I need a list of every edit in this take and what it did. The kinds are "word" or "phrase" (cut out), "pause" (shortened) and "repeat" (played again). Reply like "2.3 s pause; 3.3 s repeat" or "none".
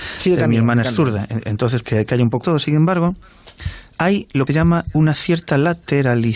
1.8 s word; 2.4 s word; 4.5 s phrase